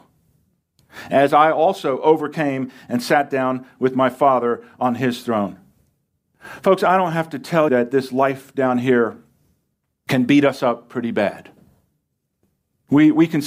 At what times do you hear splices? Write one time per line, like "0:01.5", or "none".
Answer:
0:07.7